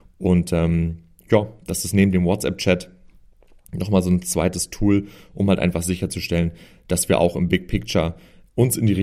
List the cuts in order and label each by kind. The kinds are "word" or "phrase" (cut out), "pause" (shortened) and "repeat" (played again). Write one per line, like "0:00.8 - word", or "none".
none